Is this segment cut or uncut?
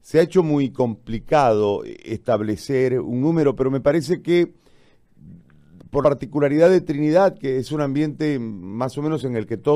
cut